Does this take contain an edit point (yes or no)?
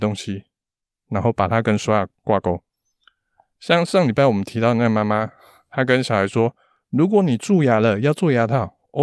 no